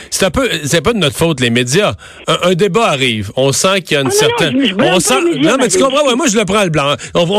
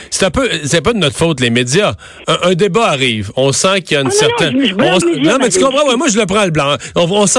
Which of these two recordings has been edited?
second; 1 cut; at 5.0 s

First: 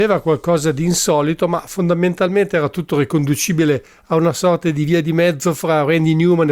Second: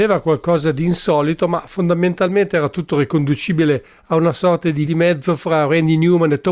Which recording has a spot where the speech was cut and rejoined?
second; 1 cut; at 4.8 s

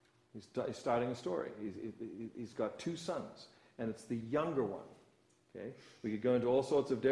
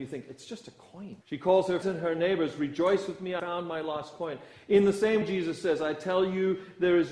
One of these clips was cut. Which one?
second; 4 cuts; at 1.2 s, 1.8 s, 3.4 s, 5.2 s

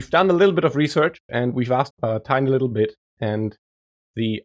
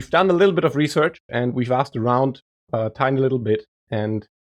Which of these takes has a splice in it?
first; 1 cut; at 1.9 s

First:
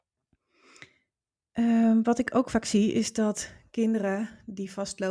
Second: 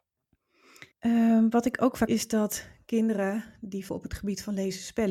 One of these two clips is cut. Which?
second; 3 cuts; at 0.9 s, 2.1 s, 3.9 s

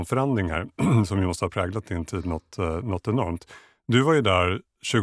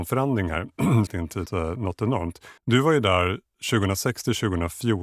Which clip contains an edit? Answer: second; 3 cuts; at 1.1 s, 1.5 s, 2.6 s

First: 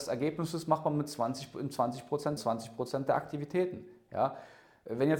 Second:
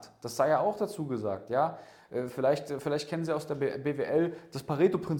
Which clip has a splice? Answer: first; 1 cut; at 2.4 s

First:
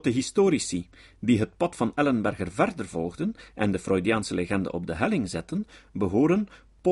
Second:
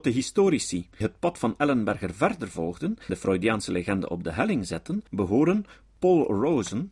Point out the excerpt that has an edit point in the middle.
second; 3 cuts; at 1.0 s, 3.1 s, 5.1 s

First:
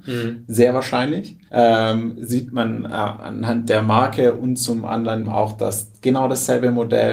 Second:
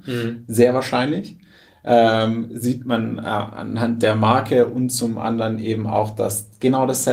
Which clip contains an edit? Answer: first; 2 cuts; at 1.5 s, 5.2 s

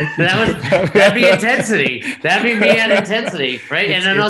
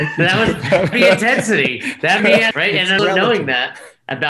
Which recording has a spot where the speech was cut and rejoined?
second; 4 cuts; at 0.9 s, 2.2 s, 2.5 s, 3.0 s

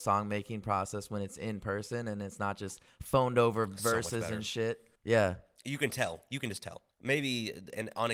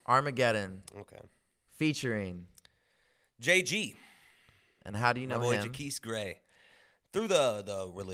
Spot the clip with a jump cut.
first; 2 cuts; at 5.0 s, 6.9 s

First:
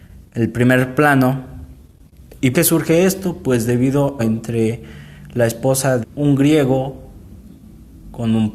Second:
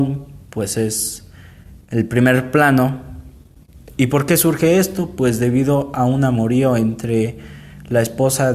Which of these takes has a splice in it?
first; 3 cuts; at 2.5 s, 4.2 s, 6.0 s

